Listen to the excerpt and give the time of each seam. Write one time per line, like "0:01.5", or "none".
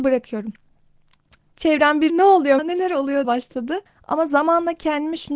0:02.1
0:02.6
0:03.2
0:03.9